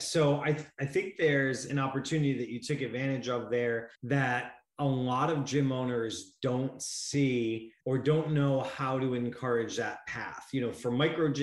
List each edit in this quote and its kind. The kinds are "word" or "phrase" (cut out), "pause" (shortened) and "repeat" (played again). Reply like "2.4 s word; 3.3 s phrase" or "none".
3.9 s pause; 7.8 s pause